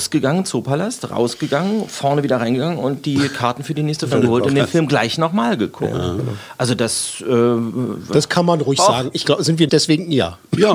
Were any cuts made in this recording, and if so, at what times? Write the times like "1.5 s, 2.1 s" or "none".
4.1 s, 9.7 s